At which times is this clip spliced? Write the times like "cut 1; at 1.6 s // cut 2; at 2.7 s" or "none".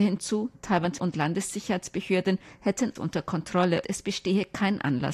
cut 1; at 1.0 s // cut 2; at 3.0 s // cut 3; at 3.8 s